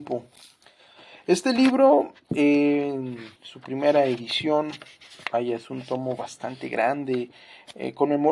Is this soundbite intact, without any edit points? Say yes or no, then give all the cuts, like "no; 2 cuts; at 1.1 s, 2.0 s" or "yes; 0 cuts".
no; 1 cut; at 3.4 s